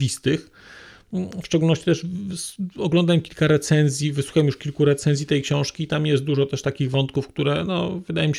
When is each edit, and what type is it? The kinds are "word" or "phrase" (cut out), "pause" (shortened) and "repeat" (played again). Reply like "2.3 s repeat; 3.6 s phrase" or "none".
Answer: none